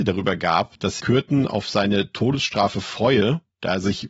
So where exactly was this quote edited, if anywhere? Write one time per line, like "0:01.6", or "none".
0:01.0